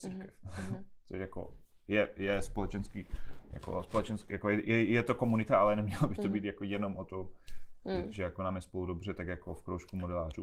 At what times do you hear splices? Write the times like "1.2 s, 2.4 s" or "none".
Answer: none